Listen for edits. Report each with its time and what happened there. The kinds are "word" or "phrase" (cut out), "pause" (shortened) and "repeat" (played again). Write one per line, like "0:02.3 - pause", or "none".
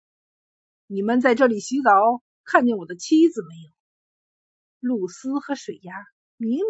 0:03.8 - pause

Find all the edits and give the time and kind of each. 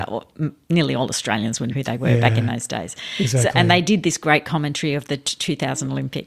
0:01.7 - word

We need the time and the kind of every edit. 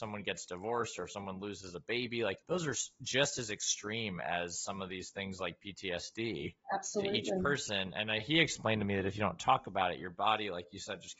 0:02.4 - pause

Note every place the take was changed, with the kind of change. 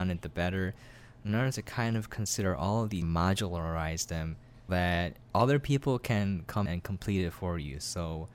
0:01.5 - phrase
0:03.0 - phrase
0:04.7 - word
0:05.2 - pause
0:06.7 - word

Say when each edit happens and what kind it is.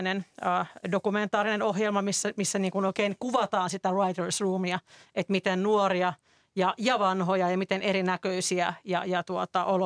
none

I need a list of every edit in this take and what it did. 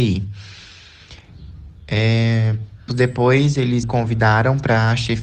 0:02.9 - word
0:03.8 - word

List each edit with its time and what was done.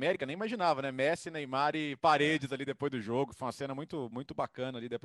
none

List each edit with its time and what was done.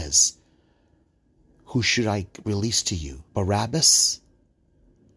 0:03.3 - pause

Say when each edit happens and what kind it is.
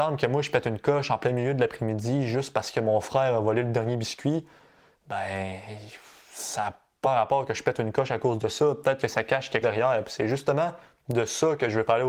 0:07.0 - word
0:09.6 - word

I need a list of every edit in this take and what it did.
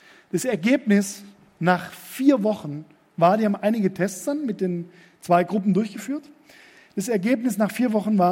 none

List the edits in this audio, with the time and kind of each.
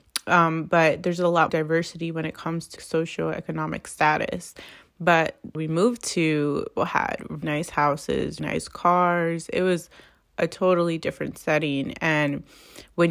0:01.5 - word
0:02.8 - word
0:05.5 - word
0:06.8 - word
0:07.4 - word
0:08.4 - word

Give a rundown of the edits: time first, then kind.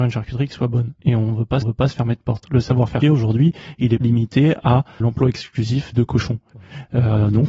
0:01.0 - pause
0:01.6 - repeat
0:03.0 - word
0:04.0 - word
0:05.0 - word
0:05.9 - word

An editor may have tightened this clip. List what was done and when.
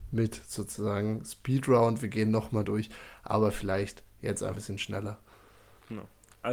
0:02.6 - phrase
0:04.6 - word

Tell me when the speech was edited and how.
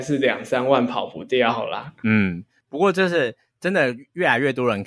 none

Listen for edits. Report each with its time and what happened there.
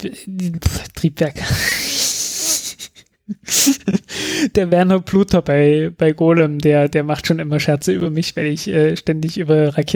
none

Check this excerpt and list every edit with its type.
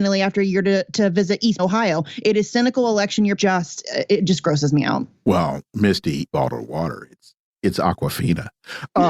0:01.6 - word
0:03.4 - phrase
0:06.3 - phrase

